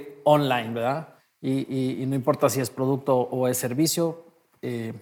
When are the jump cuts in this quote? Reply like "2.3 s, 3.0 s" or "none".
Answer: 1.2 s